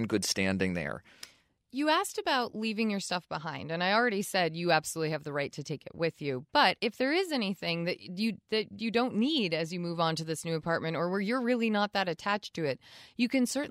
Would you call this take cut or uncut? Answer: uncut